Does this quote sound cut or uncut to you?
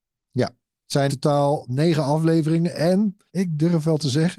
cut